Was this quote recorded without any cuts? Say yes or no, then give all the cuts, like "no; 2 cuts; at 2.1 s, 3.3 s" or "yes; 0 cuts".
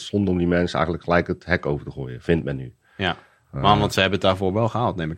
yes; 0 cuts